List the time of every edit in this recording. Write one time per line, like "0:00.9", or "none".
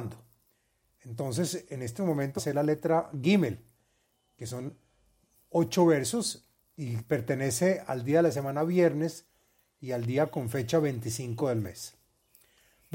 0:02.4
0:06.6